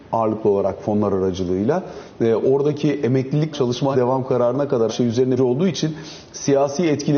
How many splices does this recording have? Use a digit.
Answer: 4